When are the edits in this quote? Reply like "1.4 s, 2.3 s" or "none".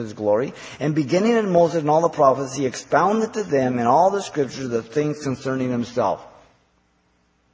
none